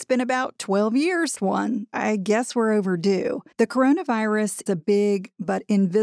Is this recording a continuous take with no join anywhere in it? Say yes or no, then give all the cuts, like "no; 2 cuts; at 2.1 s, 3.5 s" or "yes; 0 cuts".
no; 4 cuts; at 1.3 s, 1.9 s, 3.5 s, 4.7 s